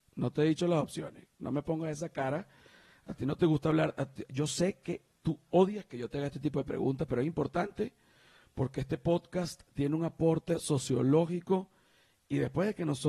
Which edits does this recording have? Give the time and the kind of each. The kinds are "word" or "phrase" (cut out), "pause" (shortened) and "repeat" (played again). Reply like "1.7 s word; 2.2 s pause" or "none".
none